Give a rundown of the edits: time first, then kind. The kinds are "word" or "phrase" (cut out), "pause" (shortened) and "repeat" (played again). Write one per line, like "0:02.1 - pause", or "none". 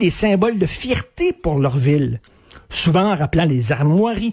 none